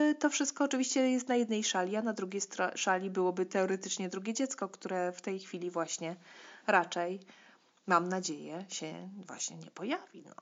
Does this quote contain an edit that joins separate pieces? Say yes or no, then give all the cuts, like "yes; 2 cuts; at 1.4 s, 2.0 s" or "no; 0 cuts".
no; 0 cuts